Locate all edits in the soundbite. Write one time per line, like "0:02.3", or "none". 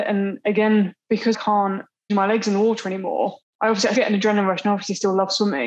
0:01.3
0:02.1
0:03.9